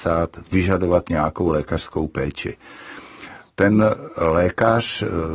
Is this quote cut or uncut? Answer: uncut